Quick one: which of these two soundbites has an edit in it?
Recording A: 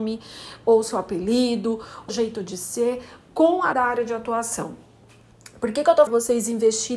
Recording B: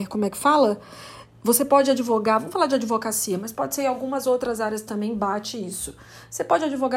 A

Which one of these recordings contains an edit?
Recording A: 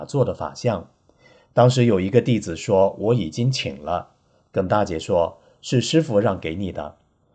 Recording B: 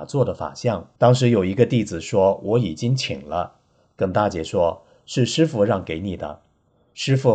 B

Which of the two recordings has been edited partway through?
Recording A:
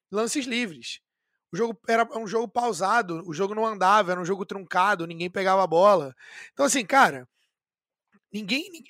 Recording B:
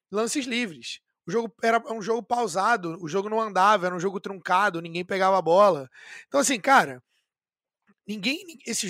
B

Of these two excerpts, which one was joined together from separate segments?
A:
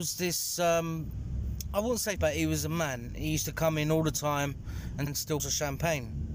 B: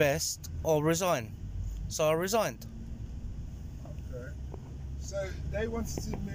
A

